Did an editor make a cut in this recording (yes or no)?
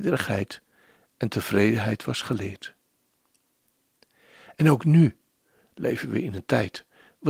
no